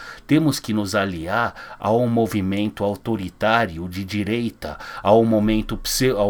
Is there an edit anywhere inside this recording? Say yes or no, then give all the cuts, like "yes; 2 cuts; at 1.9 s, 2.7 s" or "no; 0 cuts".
no; 0 cuts